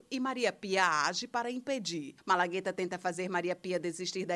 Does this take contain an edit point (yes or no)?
no